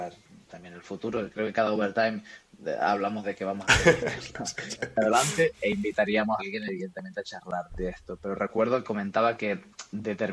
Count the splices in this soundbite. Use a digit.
4